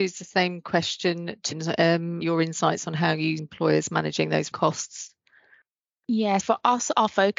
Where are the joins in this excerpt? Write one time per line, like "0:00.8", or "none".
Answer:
0:01.5
0:02.2
0:03.4
0:04.5
0:06.4

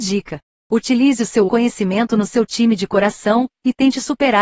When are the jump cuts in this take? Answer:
0:01.5

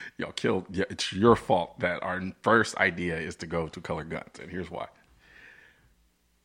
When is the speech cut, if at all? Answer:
none

